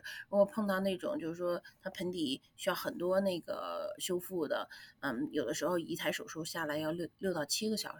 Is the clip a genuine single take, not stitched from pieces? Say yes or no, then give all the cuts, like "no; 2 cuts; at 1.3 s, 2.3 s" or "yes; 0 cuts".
yes; 0 cuts